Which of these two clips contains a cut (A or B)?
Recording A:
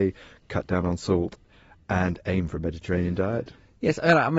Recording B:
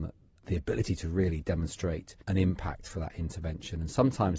B